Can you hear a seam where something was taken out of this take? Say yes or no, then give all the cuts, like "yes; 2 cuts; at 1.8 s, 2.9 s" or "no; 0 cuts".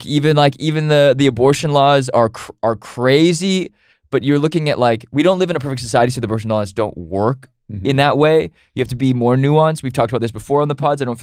no; 0 cuts